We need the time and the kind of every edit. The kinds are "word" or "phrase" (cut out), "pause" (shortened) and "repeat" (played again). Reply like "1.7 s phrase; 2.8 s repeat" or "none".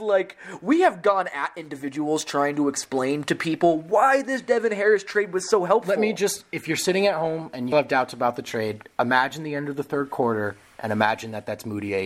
7.7 s word